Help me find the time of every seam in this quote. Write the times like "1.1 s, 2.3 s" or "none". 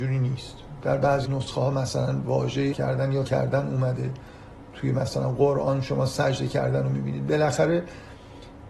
1.2 s, 2.7 s, 3.2 s, 4.7 s